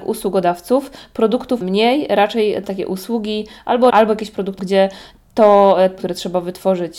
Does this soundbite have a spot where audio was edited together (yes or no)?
yes